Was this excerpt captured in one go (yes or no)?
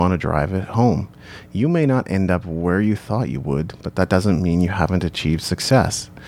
yes